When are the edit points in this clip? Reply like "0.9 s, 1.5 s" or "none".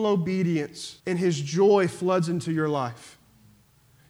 1.0 s

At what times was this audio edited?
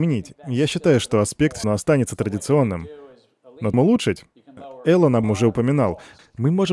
1.6 s, 3.7 s, 5.2 s

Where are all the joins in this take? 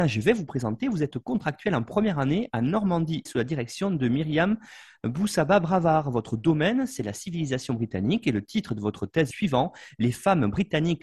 1.1 s, 3.3 s, 9.3 s

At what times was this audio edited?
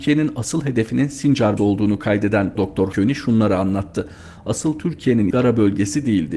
1.6 s, 2.6 s, 2.9 s, 5.3 s

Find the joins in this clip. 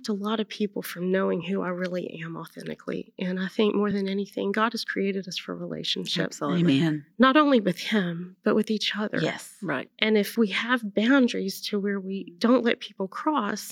none

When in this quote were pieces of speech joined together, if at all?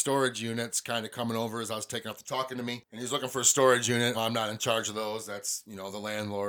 2.2 s, 4.1 s

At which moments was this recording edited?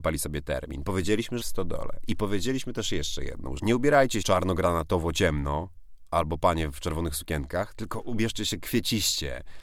1.4 s, 3.6 s, 4.2 s

